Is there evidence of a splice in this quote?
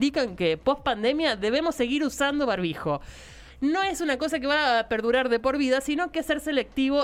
yes; 1 cut; at 6.1 s

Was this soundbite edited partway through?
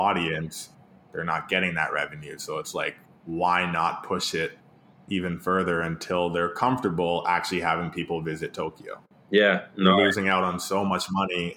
no; 0 cuts

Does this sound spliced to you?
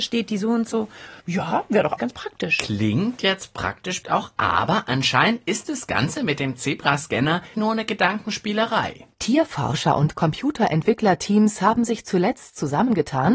yes; 5 cuts; at 1.2 s, 2.0 s, 4.0 s, 7.5 s, 9.1 s

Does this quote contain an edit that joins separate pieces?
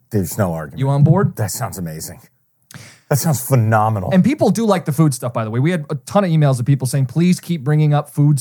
no; 0 cuts

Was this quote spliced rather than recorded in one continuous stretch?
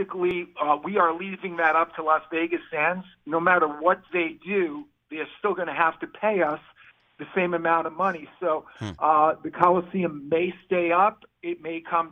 no; 0 cuts

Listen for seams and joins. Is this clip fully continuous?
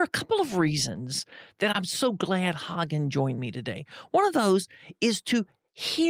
yes; 0 cuts

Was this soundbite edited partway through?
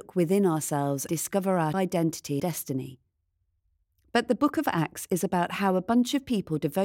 yes; 3 cuts; at 1.1 s, 1.7 s, 2.4 s

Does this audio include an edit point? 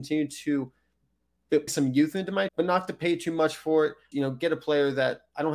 yes; 3 cuts; at 1.7 s, 2.5 s, 4.1 s

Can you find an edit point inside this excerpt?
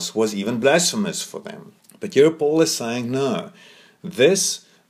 yes; 1 cut; at 1.8 s

